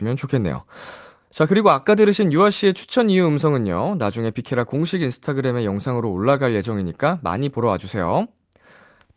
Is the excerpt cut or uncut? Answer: uncut